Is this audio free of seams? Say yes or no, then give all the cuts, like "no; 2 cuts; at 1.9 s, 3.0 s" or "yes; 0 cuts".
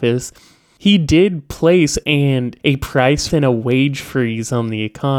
no; 3 cuts; at 2.0 s, 2.6 s, 3.3 s